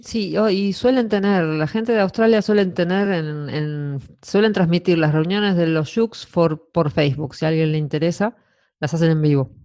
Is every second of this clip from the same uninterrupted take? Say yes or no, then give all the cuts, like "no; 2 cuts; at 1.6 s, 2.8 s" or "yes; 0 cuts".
yes; 0 cuts